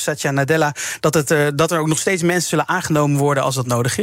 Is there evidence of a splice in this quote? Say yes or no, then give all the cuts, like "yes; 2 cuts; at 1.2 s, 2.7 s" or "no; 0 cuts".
no; 0 cuts